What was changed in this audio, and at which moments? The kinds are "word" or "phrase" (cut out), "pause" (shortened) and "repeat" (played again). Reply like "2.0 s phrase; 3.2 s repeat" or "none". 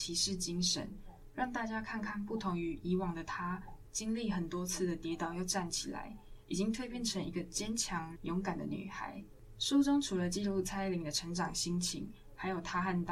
8.2 s phrase